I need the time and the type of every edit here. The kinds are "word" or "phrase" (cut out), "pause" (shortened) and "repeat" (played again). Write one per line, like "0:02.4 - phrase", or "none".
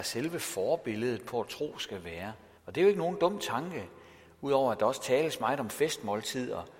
0:02.5 - pause